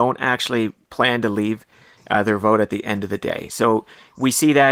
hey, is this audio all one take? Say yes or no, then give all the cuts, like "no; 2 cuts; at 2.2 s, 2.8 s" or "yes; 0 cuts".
yes; 0 cuts